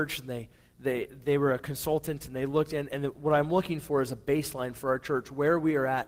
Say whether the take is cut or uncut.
uncut